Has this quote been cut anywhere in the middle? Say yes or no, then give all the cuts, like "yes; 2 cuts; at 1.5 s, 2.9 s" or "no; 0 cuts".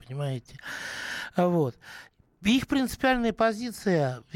no; 0 cuts